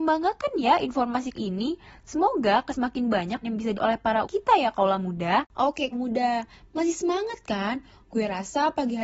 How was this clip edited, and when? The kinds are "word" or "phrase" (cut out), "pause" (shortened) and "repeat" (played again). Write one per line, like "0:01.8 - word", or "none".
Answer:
0:01.3 - word
0:02.7 - word
0:03.4 - word
0:03.7 - word
0:04.2 - word
0:05.9 - word